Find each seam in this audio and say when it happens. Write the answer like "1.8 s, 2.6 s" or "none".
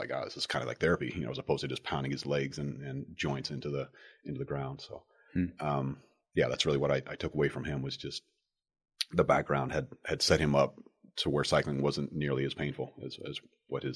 none